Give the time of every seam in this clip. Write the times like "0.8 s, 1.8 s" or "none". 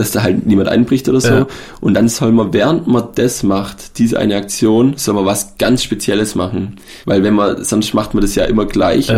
7.0 s